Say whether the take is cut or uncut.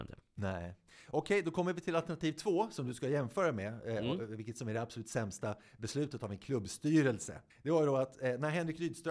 cut